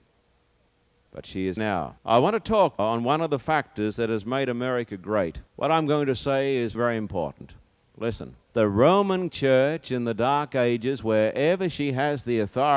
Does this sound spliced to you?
yes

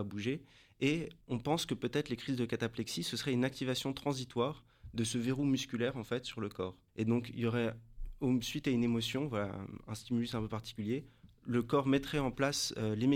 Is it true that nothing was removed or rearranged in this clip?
no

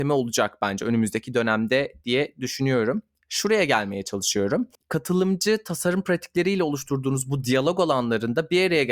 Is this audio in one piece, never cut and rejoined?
yes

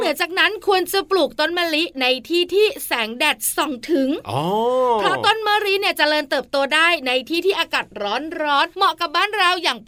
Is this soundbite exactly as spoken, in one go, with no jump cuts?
no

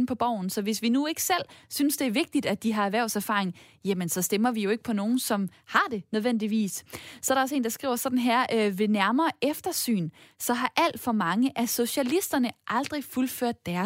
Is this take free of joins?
yes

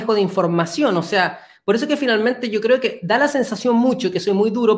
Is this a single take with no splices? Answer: yes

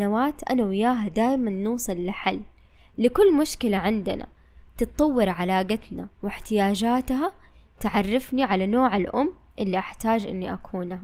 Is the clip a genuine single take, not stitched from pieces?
yes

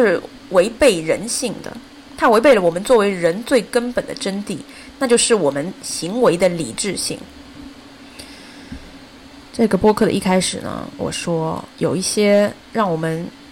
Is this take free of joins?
no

